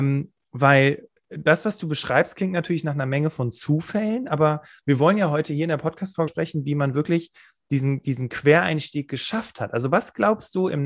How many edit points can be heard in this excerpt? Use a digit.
2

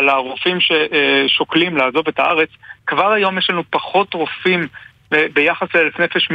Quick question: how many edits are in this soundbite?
0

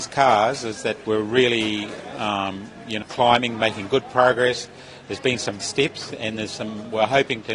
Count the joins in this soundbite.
3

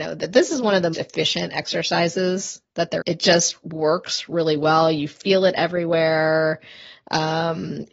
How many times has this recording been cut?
2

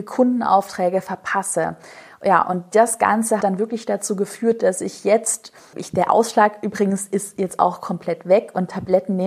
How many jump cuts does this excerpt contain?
2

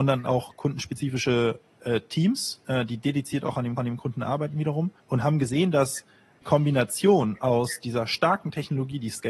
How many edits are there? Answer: 3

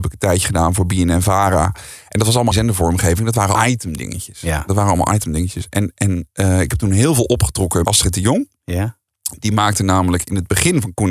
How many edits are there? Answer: 3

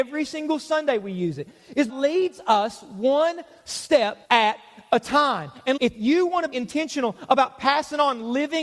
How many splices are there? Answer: 4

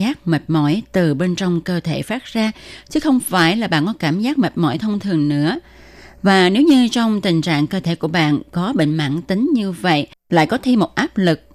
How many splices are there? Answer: 0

